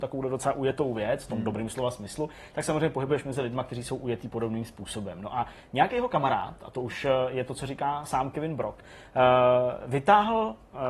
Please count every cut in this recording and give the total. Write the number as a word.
zero